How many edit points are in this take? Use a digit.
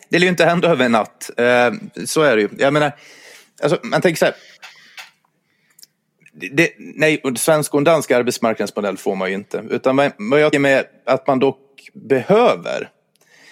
1